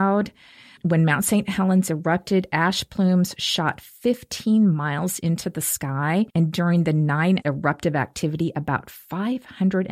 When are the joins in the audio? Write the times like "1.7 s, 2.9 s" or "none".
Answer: 6.3 s, 7.4 s